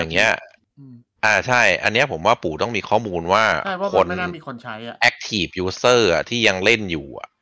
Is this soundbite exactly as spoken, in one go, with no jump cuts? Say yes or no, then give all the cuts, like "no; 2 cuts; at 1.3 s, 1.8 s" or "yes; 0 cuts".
yes; 0 cuts